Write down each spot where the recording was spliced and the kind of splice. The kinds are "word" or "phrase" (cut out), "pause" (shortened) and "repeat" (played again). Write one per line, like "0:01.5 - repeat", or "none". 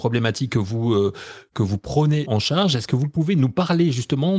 0:02.3 - word